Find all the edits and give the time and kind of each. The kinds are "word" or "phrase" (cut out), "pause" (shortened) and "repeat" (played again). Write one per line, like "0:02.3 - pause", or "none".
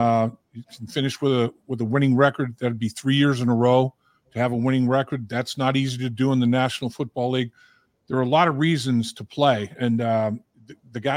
0:09.8 - word